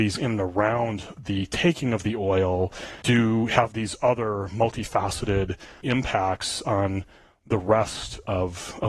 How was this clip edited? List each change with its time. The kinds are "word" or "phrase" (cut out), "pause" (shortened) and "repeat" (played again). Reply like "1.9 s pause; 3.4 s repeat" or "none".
3.0 s word; 5.8 s word